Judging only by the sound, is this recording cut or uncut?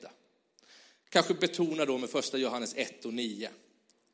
uncut